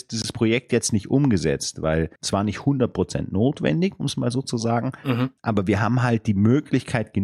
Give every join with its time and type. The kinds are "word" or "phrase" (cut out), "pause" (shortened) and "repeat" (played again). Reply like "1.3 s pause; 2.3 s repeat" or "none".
2.2 s pause; 5.4 s pause